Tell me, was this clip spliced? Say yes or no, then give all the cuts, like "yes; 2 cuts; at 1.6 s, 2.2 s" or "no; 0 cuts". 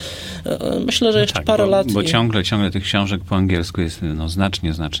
no; 0 cuts